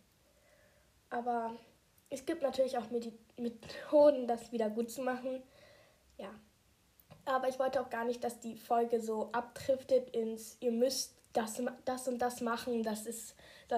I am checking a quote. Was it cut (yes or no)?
no